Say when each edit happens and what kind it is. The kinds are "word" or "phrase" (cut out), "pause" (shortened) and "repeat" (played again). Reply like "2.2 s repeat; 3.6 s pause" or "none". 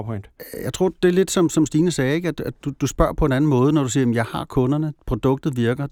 none